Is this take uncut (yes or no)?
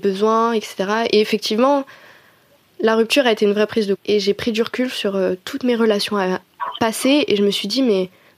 no